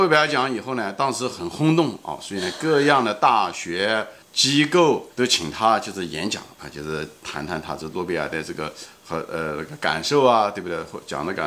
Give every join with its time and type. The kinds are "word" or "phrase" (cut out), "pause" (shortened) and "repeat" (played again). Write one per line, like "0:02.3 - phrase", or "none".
0:04.2 - pause
0:05.1 - pause